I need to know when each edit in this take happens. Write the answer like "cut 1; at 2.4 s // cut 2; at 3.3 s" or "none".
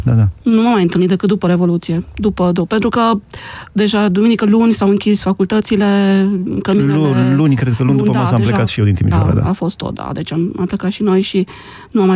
none